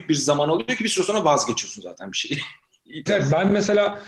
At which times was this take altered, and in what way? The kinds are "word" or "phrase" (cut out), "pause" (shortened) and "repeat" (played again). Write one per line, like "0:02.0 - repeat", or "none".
0:03.1 - word